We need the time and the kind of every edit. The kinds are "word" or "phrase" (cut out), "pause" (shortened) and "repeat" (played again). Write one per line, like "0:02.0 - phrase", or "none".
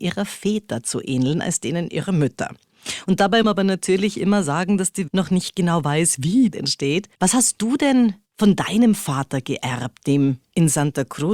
0:03.4 - word
0:05.1 - phrase
0:06.5 - phrase
0:07.1 - pause
0:08.2 - pause